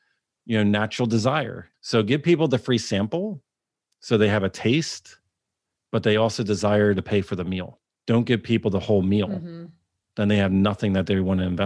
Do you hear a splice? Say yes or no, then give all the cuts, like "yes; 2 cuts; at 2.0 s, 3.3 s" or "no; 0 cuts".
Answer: no; 0 cuts